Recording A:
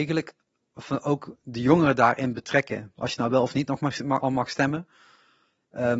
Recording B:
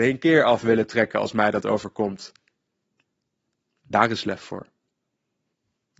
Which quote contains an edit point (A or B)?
A